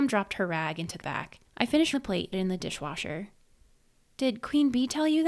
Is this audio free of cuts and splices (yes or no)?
no